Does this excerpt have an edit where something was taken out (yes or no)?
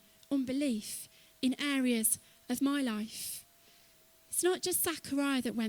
no